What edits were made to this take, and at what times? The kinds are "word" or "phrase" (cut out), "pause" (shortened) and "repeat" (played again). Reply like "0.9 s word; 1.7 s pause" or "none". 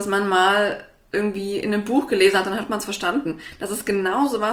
none